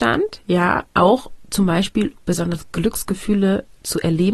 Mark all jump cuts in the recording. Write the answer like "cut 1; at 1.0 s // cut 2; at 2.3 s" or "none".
cut 1; at 2.2 s